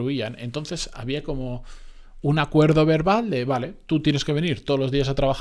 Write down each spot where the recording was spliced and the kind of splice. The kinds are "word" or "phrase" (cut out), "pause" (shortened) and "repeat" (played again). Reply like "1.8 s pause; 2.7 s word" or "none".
none